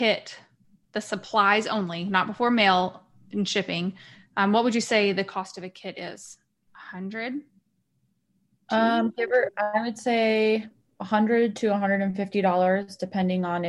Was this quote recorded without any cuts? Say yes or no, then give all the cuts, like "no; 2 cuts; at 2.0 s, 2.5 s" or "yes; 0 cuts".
yes; 0 cuts